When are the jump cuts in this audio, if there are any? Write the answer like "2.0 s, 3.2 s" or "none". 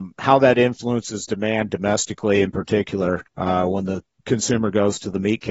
none